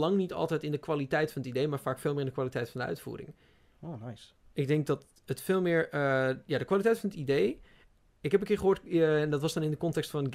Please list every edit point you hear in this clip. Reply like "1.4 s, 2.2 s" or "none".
none